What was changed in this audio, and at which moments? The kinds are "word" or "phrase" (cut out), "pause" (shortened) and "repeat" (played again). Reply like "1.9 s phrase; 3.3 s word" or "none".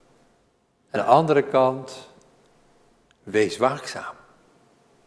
1.0 s word